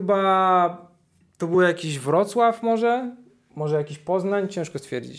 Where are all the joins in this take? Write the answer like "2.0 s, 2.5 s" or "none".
none